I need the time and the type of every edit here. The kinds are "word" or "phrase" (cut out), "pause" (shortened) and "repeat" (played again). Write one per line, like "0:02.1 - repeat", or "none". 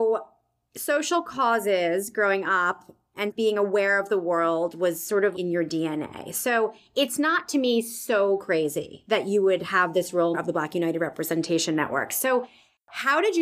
0:05.3 - word
0:10.3 - phrase